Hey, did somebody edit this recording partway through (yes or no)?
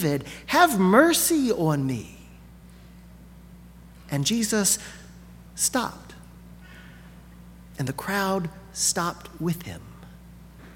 no